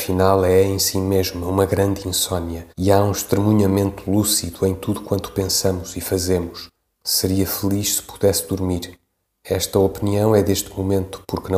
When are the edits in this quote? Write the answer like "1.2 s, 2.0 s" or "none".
2.7 s, 6.9 s, 9.2 s

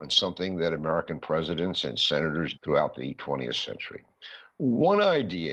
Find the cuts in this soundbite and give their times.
2.5 s

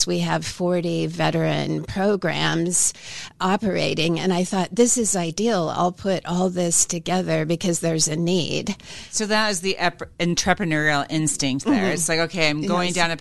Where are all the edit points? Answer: none

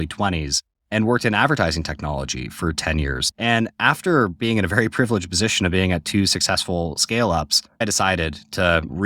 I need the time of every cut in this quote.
none

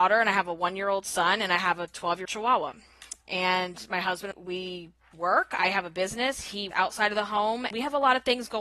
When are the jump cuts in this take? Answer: 2.2 s, 4.3 s, 5.1 s, 6.7 s, 7.7 s

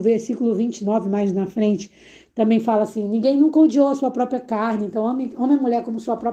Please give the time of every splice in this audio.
none

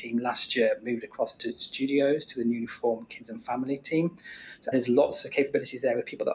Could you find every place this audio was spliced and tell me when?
4.7 s

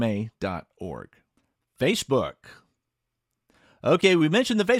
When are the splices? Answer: 1.4 s

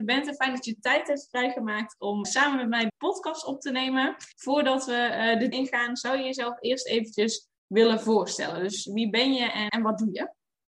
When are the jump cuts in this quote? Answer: 2.2 s, 2.9 s, 4.3 s, 5.5 s, 9.7 s

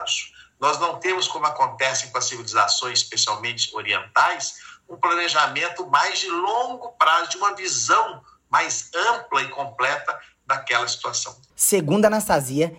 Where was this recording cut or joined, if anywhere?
11.5 s

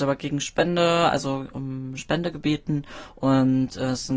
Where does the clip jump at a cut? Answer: none

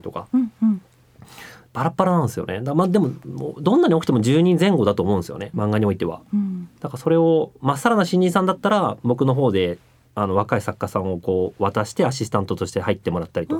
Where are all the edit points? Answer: 5.5 s, 6.8 s

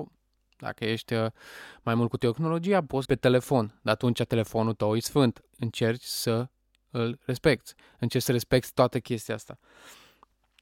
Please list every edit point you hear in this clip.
3.0 s, 5.5 s

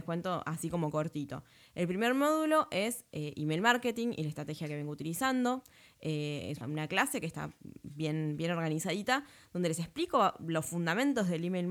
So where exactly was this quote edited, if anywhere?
6.6 s

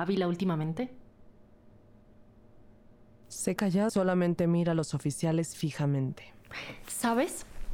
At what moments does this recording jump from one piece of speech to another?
3.6 s, 3.9 s

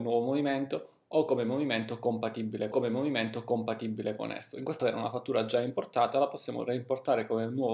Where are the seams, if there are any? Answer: 2.7 s, 4.8 s

